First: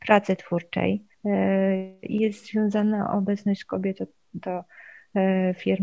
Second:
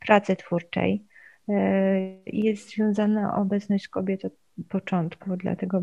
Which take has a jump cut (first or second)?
first